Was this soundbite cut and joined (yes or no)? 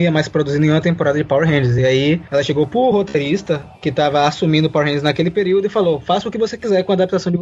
no